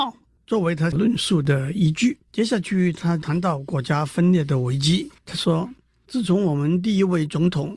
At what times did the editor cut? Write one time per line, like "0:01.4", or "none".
0:02.2
0:05.2